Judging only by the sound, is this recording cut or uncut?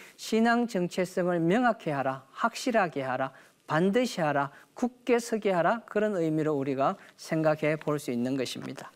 uncut